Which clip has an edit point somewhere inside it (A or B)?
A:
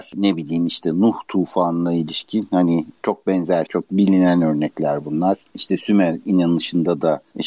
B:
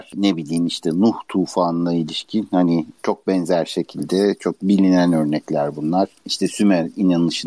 A